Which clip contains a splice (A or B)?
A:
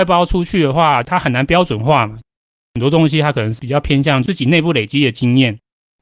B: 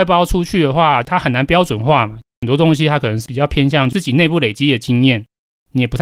B